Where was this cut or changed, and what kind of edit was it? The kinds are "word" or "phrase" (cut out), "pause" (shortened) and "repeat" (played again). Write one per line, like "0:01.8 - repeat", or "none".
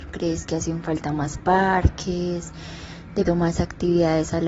0:03.3 - word